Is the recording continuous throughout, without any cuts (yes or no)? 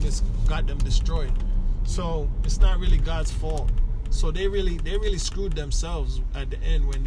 yes